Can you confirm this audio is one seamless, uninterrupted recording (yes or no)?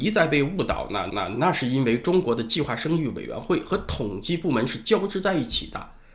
no